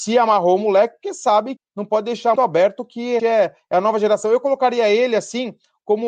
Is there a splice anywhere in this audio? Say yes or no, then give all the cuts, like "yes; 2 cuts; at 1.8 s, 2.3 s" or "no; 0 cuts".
yes; 3 cuts; at 1.6 s, 2.4 s, 3.2 s